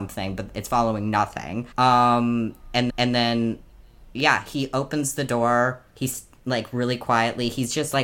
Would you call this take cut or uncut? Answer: cut